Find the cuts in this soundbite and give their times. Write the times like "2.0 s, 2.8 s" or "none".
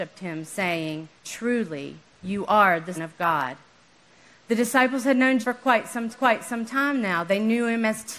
1.2 s, 2.9 s, 5.4 s, 6.1 s